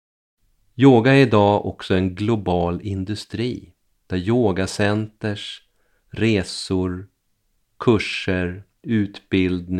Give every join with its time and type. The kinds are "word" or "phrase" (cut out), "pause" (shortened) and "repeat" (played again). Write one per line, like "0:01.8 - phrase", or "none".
none